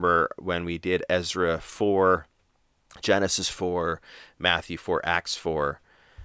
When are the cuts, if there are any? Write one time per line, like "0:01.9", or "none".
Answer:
none